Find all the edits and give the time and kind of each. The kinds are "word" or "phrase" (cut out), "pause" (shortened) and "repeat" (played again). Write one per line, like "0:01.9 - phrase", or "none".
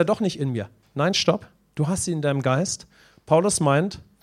none